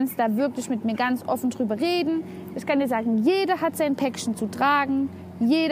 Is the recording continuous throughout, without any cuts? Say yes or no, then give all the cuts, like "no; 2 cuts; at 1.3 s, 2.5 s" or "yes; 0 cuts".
yes; 0 cuts